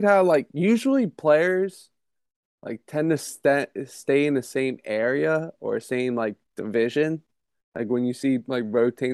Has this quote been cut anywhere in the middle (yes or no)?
no